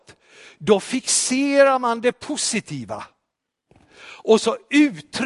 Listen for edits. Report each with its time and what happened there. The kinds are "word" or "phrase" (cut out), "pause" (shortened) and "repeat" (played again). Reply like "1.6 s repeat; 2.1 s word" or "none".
none